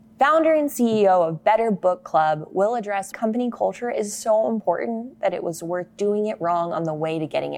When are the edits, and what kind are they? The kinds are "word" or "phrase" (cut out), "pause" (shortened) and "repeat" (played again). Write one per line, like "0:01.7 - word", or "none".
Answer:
0:03.1 - phrase